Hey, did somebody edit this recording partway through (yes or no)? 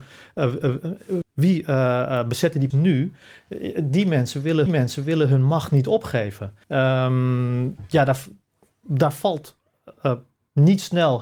yes